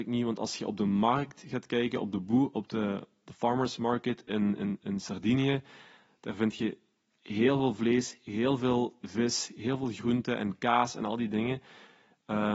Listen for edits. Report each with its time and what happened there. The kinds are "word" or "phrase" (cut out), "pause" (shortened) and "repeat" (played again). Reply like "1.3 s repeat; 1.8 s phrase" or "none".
none